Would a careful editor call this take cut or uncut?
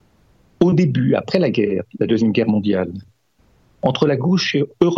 uncut